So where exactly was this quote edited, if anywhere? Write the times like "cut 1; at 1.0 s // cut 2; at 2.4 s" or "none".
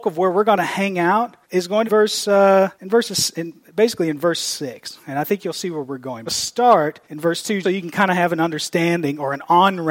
cut 1; at 1.4 s // cut 2; at 1.8 s // cut 3; at 2.7 s // cut 4; at 6.3 s // cut 5; at 7.0 s // cut 6; at 7.6 s